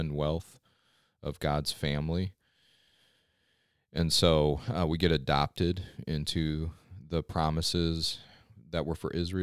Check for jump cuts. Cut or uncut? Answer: uncut